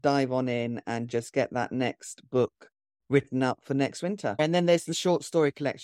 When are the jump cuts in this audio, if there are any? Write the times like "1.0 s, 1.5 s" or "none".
none